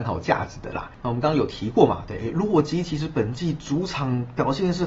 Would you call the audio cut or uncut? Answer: cut